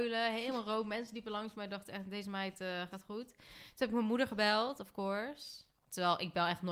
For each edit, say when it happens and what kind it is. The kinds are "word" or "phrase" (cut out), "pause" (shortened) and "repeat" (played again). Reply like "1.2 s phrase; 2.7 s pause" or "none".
none